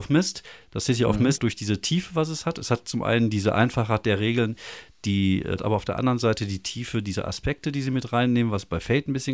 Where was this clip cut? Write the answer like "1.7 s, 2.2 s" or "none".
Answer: 1.4 s, 5.6 s